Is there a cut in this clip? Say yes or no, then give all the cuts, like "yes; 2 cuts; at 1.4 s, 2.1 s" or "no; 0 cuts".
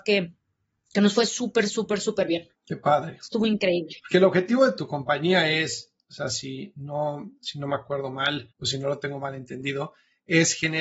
yes; 2 cuts; at 2.6 s, 8.5 s